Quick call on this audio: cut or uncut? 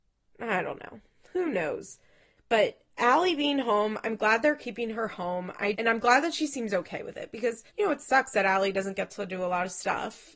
cut